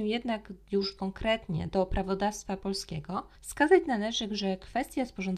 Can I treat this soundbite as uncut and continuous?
yes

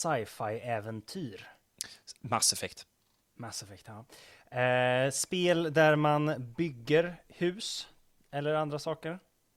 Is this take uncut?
yes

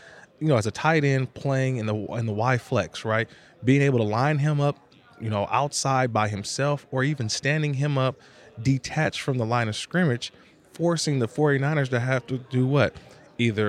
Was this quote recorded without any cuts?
yes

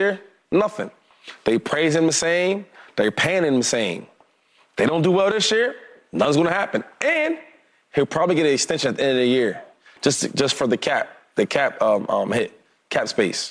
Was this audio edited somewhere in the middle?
no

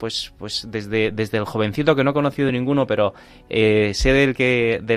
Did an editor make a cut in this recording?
no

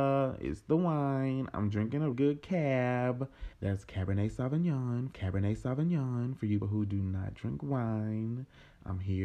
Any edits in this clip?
yes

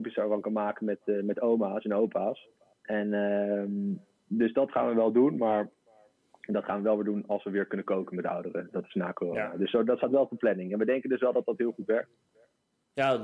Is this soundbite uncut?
no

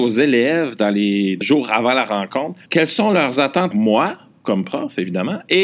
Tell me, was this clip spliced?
yes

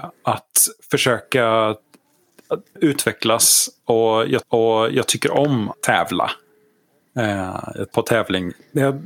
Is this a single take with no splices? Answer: no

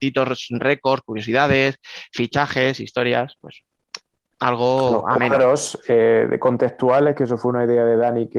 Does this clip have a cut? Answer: no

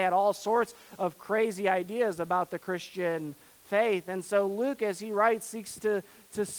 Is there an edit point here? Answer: no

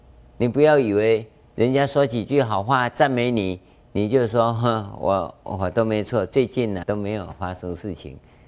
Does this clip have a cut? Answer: yes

